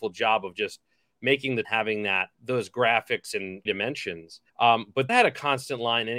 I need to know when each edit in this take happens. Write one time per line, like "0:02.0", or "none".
0:01.6
0:02.3
0:03.7
0:04.5
0:05.1